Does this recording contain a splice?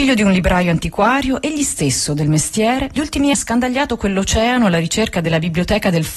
yes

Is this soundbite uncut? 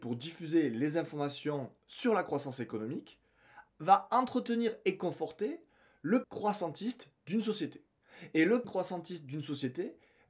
no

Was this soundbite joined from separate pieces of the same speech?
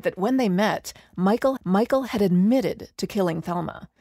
yes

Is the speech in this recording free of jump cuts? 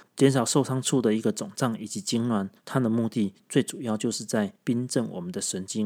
no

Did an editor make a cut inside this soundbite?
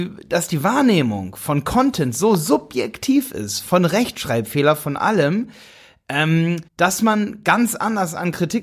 yes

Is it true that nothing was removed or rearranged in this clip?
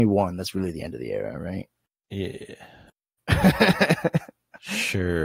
yes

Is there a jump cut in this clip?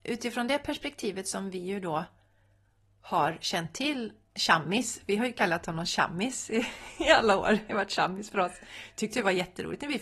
no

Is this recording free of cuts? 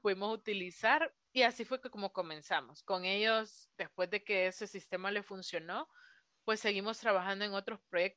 yes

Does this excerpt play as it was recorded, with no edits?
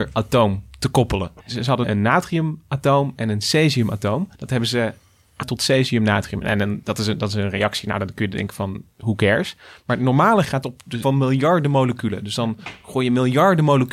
no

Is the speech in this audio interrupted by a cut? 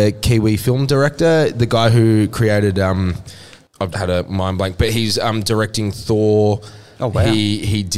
yes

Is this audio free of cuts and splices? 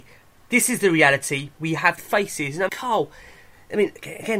no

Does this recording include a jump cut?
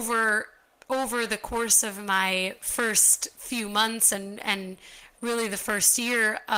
no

